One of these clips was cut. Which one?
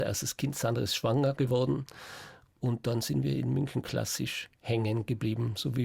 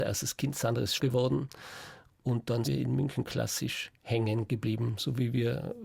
second; 2 cuts; at 1.0 s, 2.6 s

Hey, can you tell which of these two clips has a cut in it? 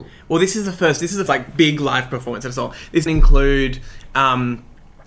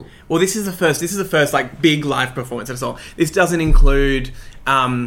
first; 2 cuts; at 1.3 s, 3.1 s

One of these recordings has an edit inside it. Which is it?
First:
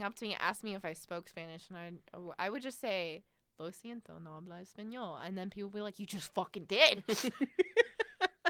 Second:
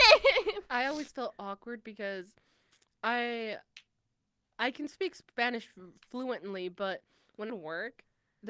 second; 1 cut; at 7.5 s

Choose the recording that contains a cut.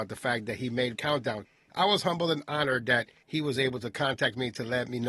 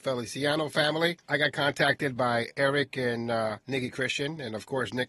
first; 1 cut; at 0.9 s

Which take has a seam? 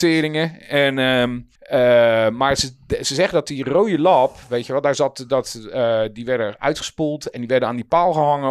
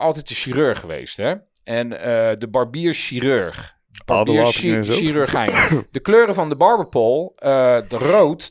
first; 1 cut; at 1.6 s

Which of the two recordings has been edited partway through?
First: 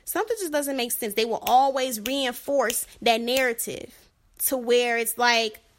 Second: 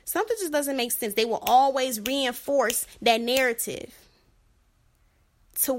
first; 1 cut; at 4.1 s

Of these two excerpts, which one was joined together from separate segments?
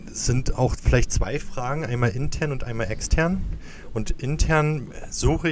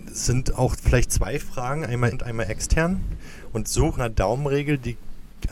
second; 3 cuts; at 2.1 s, 3.6 s, 4.0 s

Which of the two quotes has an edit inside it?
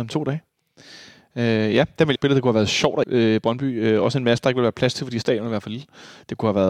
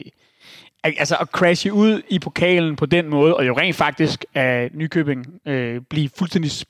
first; 2 cuts; at 2.2 s, 3.0 s

